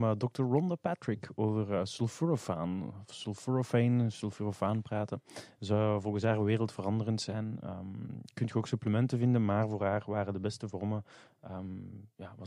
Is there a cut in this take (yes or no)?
no